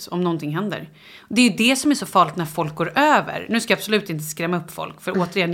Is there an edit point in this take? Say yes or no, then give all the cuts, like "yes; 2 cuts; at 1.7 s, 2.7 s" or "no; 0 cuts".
no; 0 cuts